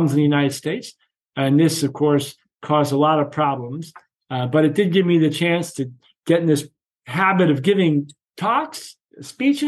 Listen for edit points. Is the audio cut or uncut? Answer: uncut